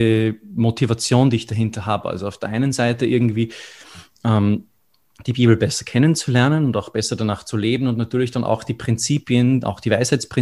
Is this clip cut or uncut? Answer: uncut